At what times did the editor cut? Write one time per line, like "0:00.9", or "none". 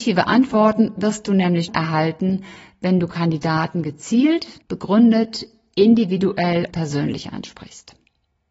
0:01.7
0:04.6
0:06.7